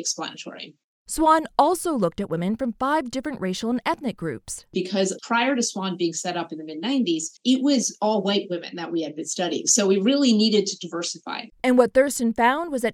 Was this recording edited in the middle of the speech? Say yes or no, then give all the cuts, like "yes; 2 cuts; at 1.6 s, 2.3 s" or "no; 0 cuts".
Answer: yes; 1 cut; at 7.4 s